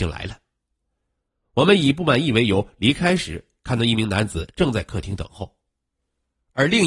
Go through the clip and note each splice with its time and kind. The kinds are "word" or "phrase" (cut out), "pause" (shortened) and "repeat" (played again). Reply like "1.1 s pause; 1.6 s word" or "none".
none